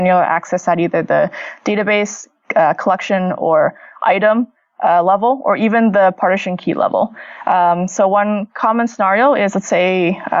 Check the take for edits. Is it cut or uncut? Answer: uncut